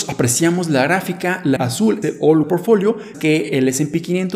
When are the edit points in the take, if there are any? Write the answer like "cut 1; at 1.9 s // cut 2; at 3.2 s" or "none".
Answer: cut 1; at 1.6 s // cut 2; at 2.0 s // cut 3; at 2.4 s // cut 4; at 3.1 s